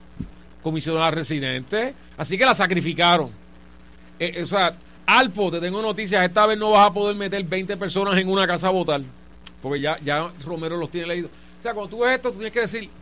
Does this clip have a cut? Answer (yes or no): no